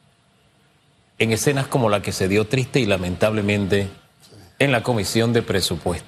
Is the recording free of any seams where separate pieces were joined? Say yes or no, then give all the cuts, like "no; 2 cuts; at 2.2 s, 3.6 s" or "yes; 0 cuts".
yes; 0 cuts